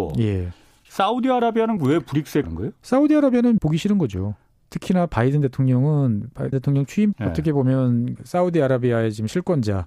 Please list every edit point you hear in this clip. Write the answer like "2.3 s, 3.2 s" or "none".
1.8 s, 2.4 s, 3.6 s, 6.5 s, 7.1 s, 8.2 s